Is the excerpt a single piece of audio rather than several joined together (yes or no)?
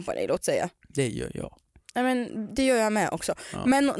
yes